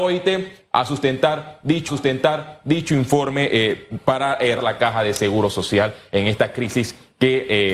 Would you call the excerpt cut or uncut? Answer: cut